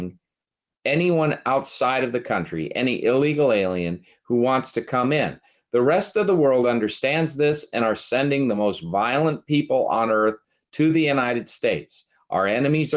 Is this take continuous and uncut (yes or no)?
yes